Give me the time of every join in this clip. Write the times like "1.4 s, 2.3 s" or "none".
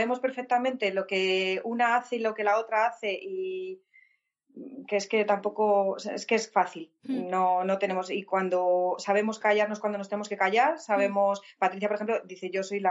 none